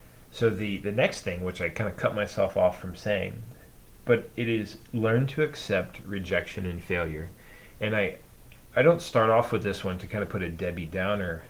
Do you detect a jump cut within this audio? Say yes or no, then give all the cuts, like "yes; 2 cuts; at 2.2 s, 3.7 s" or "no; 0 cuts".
no; 0 cuts